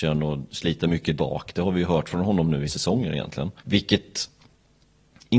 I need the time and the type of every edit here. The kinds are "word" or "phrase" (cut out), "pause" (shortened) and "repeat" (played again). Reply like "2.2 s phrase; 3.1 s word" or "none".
1.2 s word; 2.7 s phrase; 3.6 s pause